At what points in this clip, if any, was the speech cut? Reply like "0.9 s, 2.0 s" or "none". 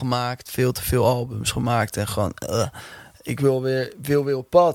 none